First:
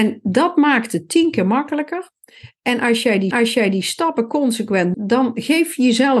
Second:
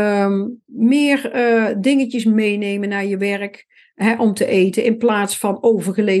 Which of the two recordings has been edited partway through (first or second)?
first